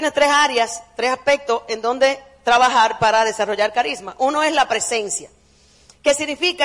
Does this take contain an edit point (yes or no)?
no